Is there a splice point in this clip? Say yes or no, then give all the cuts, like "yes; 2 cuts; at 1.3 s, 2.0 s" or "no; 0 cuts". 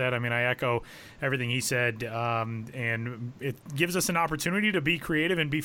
no; 0 cuts